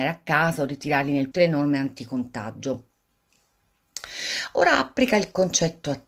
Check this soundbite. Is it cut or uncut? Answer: cut